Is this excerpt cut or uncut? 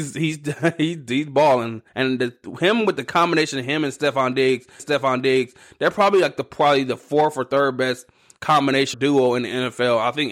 cut